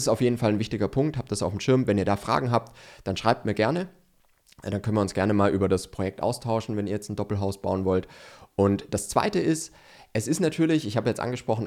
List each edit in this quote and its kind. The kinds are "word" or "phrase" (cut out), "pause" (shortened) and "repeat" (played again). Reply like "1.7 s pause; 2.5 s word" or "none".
none